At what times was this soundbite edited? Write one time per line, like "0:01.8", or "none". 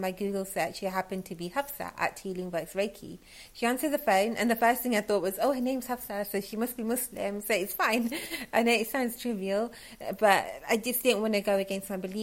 none